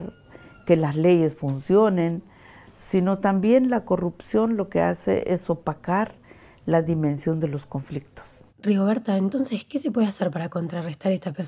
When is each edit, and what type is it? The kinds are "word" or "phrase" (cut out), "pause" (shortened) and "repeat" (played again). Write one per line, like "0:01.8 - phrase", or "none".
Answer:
0:08.5 - pause